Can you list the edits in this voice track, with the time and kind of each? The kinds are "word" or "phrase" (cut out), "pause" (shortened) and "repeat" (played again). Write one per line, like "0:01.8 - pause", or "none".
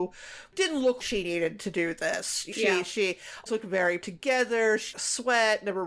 0:01.0 - word
0:02.5 - word
0:03.5 - word
0:04.0 - word
0:04.9 - phrase

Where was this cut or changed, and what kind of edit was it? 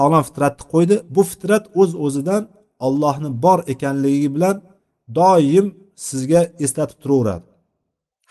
none

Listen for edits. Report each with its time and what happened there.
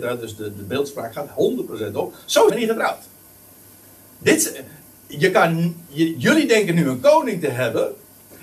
0:02.5 - word

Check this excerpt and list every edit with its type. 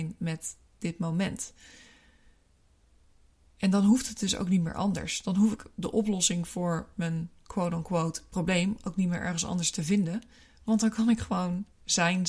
none

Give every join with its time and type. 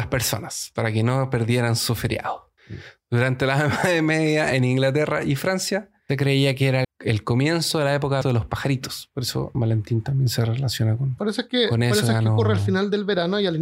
0:02.6 - pause
0:06.1 - word
0:06.8 - word
0:08.2 - word
0:09.5 - word
0:11.2 - word

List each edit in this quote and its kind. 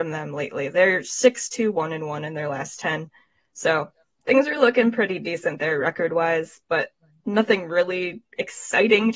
none

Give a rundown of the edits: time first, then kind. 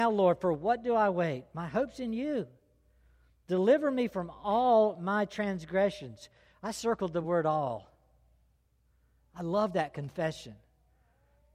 none

